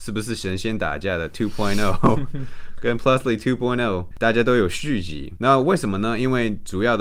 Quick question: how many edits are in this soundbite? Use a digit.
0